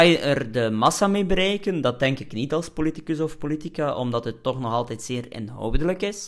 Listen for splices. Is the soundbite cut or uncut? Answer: uncut